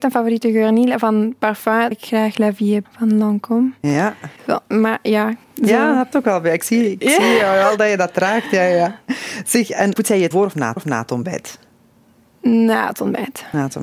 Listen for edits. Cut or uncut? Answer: cut